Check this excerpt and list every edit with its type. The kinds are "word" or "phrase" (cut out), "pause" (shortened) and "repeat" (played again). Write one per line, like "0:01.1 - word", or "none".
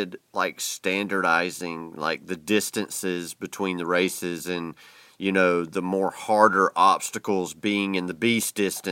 none

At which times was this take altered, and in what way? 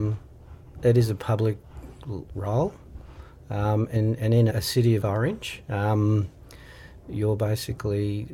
0:04.0 - word
0:04.5 - word
0:05.0 - word

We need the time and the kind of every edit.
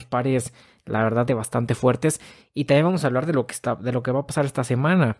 0:01.3 - word

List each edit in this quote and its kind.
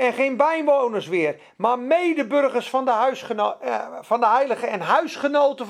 none

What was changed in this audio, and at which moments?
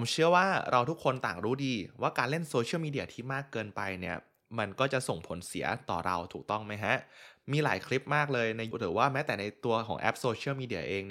0:08.7 - word

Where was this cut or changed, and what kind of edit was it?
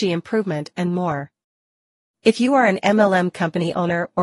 none

